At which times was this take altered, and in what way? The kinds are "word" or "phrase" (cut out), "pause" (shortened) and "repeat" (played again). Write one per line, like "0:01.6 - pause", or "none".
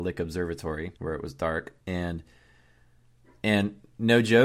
0:01.0 - pause
0:01.8 - pause

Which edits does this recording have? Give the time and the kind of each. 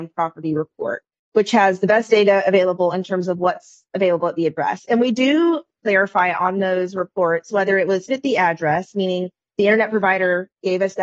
0:08.1 - word

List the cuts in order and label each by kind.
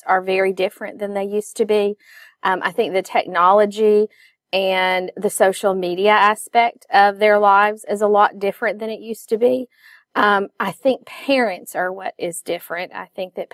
none

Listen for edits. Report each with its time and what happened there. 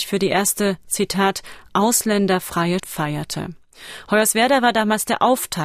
0:02.8 - word

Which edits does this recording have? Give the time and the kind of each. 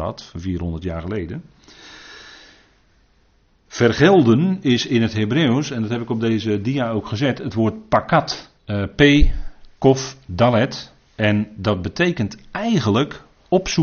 0:08.6 - pause

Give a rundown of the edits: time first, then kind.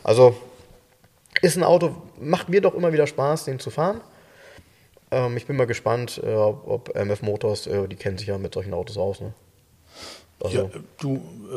none

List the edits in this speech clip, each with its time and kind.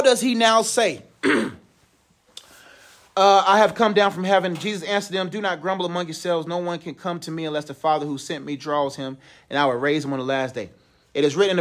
none

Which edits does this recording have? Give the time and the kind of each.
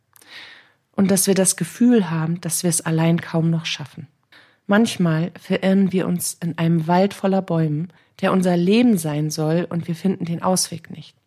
0:04.3 - pause
0:08.0 - pause

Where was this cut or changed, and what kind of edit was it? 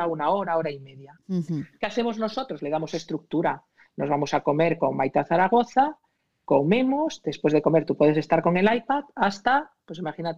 none

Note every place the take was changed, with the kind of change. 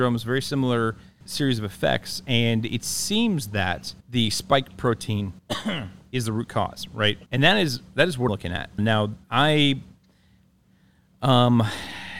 0:01.2 - word
0:04.0 - pause
0:05.4 - pause
0:07.3 - pause
0:08.3 - word
0:08.8 - word
0:09.2 - pause

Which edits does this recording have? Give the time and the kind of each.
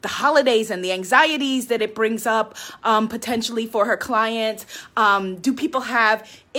none

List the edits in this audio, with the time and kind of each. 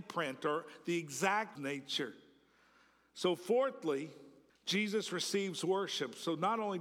0:01.5 - phrase
0:04.5 - pause

